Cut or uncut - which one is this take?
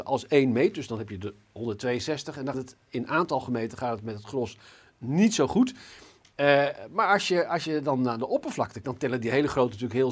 cut